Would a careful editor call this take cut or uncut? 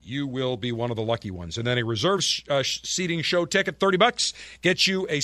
uncut